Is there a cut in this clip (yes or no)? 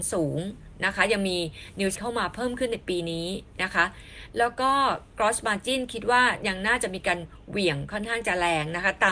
yes